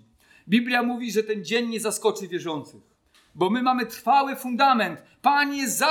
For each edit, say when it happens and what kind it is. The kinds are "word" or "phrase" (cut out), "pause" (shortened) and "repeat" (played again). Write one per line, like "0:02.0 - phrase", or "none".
none